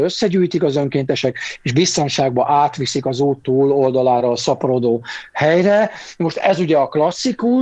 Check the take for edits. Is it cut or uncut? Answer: uncut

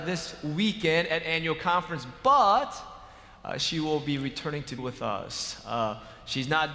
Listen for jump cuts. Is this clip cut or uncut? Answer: cut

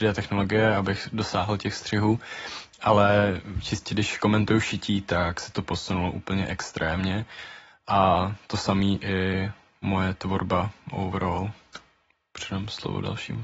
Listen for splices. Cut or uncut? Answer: uncut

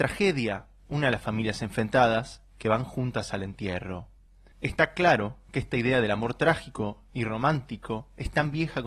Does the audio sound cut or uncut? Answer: uncut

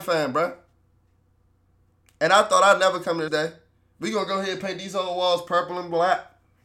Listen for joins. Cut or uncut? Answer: cut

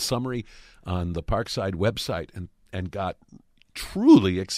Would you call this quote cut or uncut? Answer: uncut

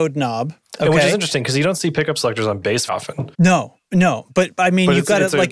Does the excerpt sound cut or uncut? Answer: cut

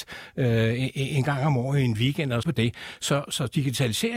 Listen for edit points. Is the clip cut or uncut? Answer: cut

